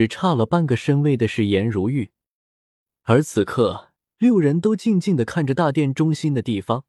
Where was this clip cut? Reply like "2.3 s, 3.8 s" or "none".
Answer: 4.1 s